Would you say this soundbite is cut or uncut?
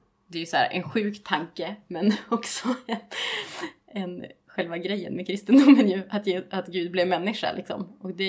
uncut